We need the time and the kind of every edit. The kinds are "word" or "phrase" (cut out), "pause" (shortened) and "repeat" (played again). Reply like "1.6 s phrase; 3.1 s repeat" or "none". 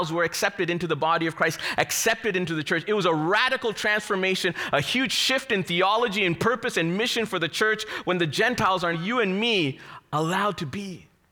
8.9 s word